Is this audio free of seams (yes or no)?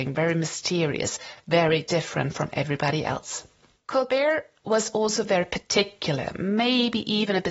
yes